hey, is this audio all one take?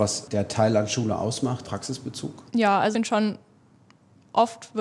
no; 3 cuts; at 1.6 s, 2.5 s, 2.9 s

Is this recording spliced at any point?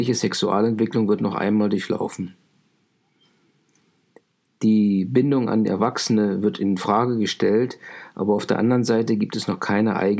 no; 0 cuts

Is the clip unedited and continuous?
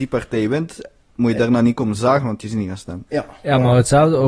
yes; 0 cuts

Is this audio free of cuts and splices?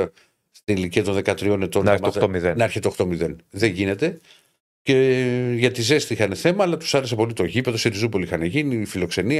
yes; 0 cuts

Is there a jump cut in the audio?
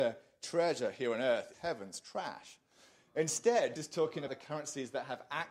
yes; 3 cuts; at 1.5 s, 3.8 s, 4.3 s

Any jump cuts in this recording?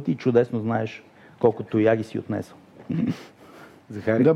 no; 0 cuts

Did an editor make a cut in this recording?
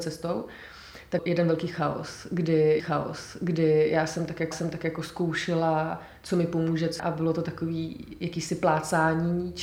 yes; 4 cuts; at 1.2 s, 2.8 s, 4.5 s, 7.0 s

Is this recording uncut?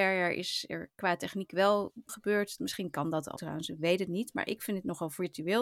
no; 3 cuts; at 2.1 s, 2.6 s, 3.4 s

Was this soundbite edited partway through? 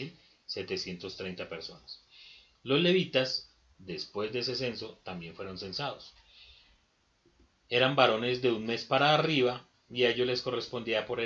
no; 0 cuts

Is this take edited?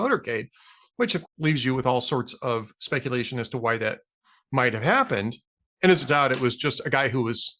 yes; 3 cuts; at 1.2 s, 5.6 s, 6.1 s

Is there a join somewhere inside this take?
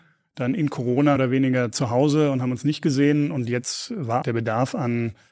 yes; 2 cuts; at 1.2 s, 4.2 s

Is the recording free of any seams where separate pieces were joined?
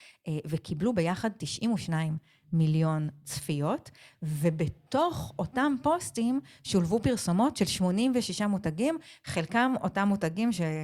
yes; 0 cuts

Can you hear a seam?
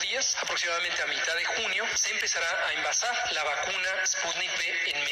no; 0 cuts

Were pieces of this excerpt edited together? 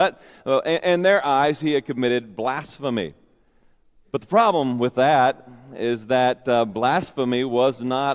no; 0 cuts

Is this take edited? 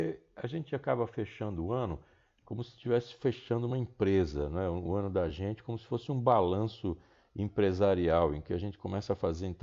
no; 0 cuts

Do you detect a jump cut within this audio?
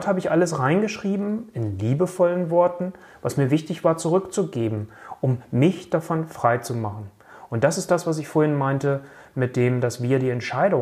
no; 0 cuts

